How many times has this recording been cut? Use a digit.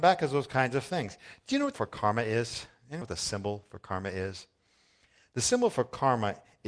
2